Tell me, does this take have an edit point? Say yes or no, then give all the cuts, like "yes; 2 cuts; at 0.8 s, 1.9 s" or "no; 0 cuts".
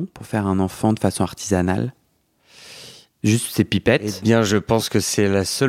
no; 0 cuts